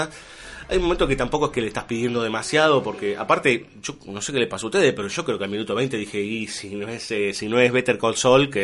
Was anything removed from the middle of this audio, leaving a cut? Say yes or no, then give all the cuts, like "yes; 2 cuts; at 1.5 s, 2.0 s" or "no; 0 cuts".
no; 0 cuts